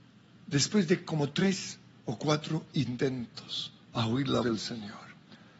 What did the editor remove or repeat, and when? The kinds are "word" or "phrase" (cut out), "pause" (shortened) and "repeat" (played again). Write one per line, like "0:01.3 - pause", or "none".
0:03.8 - pause
0:04.4 - word